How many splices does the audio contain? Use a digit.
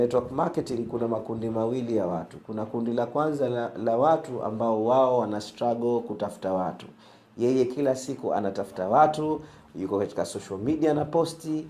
0